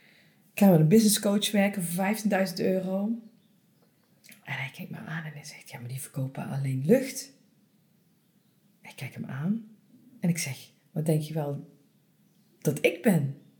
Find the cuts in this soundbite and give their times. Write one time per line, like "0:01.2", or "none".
none